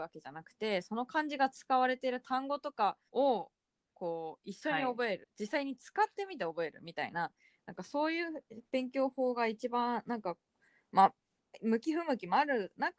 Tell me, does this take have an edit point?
yes; 2 cuts; at 3.1 s, 5.2 s

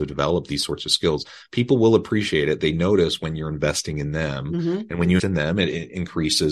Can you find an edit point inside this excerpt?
yes; 1 cut; at 5.2 s

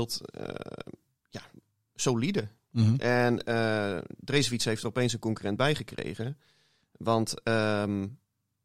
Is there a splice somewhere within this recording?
no; 0 cuts

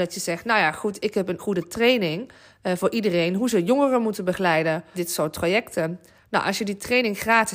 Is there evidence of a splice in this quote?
yes; 2 cuts; at 1.4 s, 4.9 s

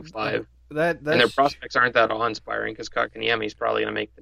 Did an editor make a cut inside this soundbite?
no; 0 cuts

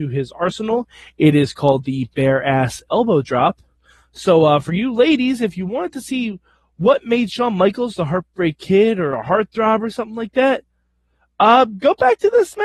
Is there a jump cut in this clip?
no; 0 cuts

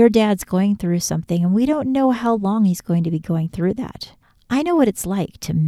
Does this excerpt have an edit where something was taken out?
no; 0 cuts

